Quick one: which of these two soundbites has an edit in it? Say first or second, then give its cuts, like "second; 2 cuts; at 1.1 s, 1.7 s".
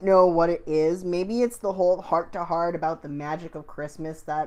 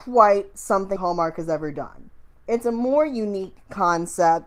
second; 1 cut; at 1.0 s